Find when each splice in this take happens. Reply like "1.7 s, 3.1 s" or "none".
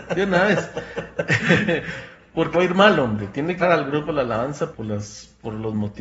2.5 s, 3.6 s, 4.7 s